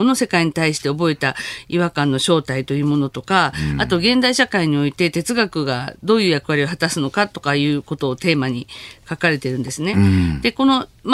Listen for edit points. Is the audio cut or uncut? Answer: uncut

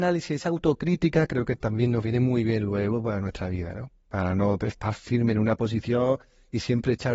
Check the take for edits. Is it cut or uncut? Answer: uncut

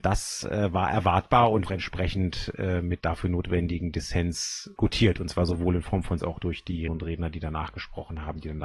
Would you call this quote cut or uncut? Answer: cut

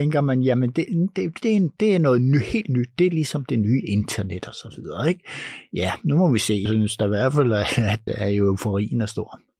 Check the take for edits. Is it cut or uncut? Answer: cut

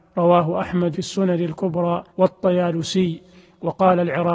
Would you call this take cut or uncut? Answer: cut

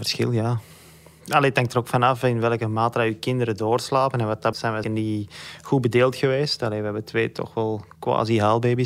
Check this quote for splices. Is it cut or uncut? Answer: cut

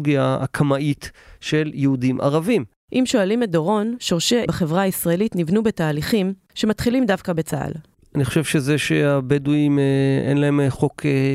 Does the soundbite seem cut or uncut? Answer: cut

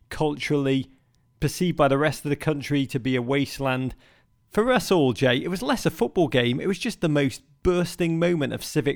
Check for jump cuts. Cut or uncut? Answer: uncut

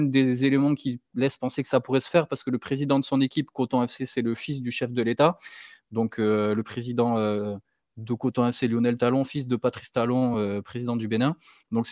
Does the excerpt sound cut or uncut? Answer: uncut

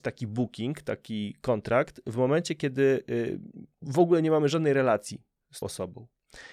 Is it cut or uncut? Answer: cut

